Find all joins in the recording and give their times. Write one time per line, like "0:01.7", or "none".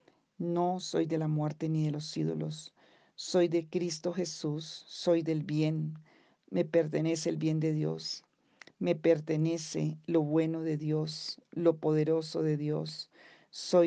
none